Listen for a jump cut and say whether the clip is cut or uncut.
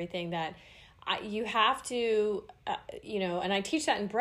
uncut